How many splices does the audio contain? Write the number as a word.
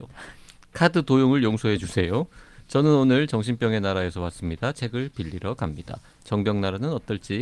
zero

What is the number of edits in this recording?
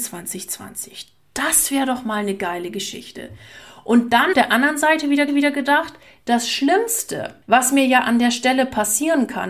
three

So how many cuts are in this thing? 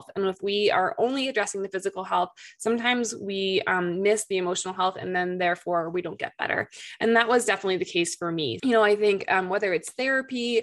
one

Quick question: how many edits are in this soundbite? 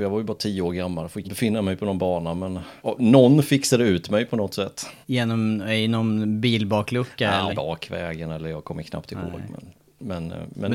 four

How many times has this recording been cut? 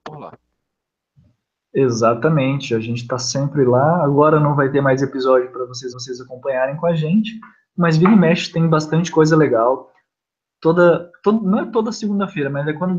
one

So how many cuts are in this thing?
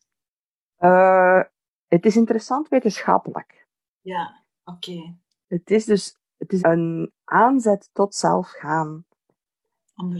one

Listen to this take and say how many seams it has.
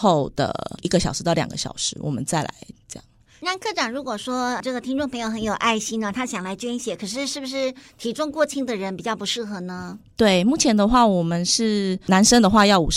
zero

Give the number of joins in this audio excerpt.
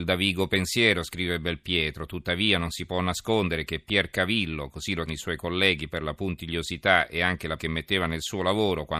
two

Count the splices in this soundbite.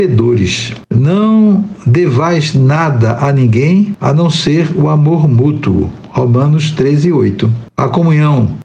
zero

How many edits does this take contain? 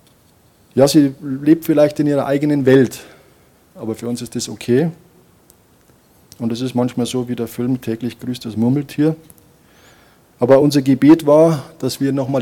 zero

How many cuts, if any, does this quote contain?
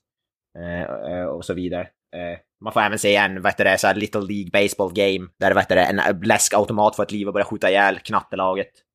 one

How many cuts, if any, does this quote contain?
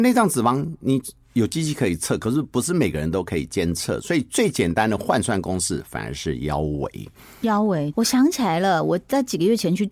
one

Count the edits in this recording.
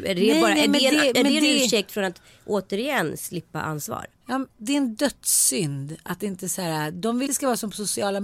two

